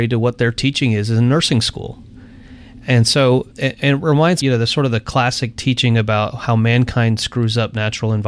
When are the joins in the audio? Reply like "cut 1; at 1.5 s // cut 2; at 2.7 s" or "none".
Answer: cut 1; at 3.5 s // cut 2; at 4.4 s